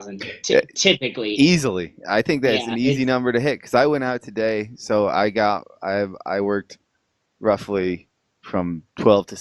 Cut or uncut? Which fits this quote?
uncut